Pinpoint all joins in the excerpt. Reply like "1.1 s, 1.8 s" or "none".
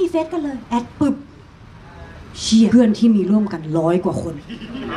2.7 s

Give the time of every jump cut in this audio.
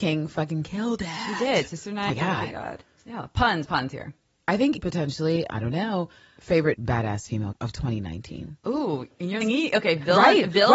2.1 s, 2.5 s, 3.7 s, 4.8 s, 5.5 s, 6.7 s, 7.5 s, 9.4 s

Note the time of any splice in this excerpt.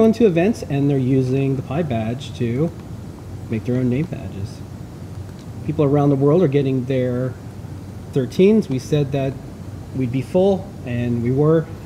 8.1 s

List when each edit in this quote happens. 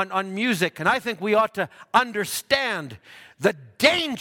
none

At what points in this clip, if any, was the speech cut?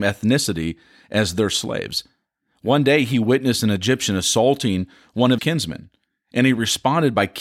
5.4 s

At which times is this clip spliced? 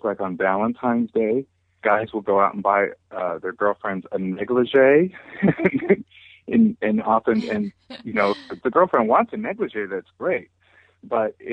8.6 s

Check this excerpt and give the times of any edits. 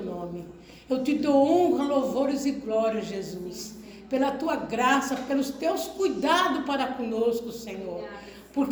none

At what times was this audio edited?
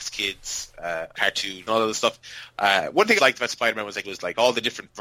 1.1 s, 1.7 s, 3.2 s, 4.0 s

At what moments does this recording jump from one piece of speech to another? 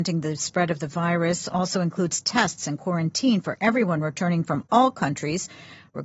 none

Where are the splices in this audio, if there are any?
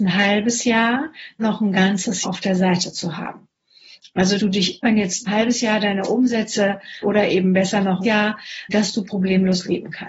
1.4 s, 2.2 s, 4.4 s, 4.8 s, 5.3 s, 7.0 s, 8.0 s, 8.7 s

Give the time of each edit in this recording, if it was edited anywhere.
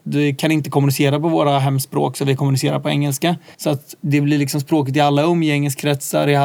3.5 s

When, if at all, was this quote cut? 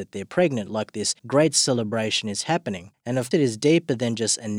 1.2 s, 2.9 s, 3.3 s

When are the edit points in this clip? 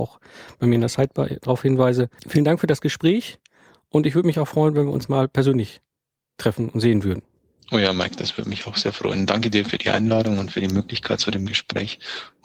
2.2 s

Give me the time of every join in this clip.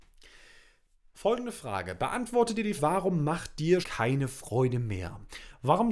2.8 s, 3.8 s

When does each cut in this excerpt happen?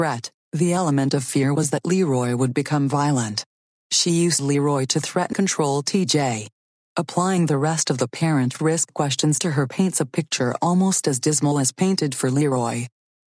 5.3 s

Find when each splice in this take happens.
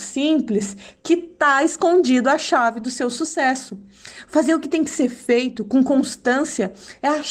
none

